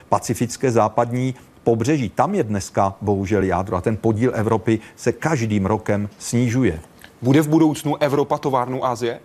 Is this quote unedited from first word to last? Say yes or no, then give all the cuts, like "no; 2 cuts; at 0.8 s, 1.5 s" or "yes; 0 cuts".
yes; 0 cuts